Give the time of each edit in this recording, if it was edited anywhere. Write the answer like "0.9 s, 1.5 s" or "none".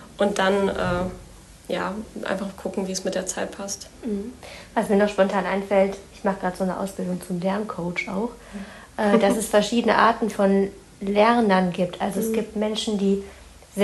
none